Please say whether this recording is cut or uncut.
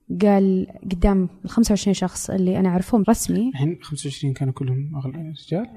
cut